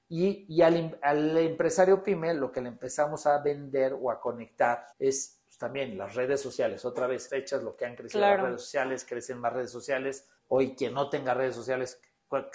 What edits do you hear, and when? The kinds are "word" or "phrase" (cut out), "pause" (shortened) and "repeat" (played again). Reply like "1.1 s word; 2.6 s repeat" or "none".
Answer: 4.9 s pause; 7.3 s word; 10.4 s pause